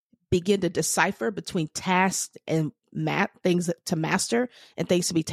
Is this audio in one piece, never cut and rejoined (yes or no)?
yes